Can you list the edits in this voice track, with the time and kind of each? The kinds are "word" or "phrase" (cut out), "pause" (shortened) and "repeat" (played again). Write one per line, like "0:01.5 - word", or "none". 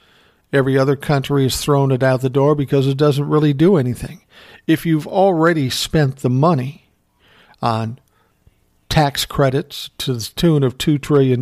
none